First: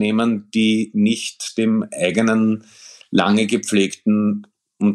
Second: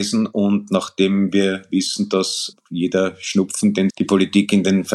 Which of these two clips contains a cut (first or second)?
second